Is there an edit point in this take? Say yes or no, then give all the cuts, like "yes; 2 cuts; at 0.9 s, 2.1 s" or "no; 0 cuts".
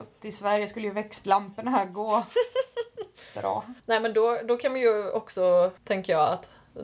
yes; 2 cuts; at 3.8 s, 5.8 s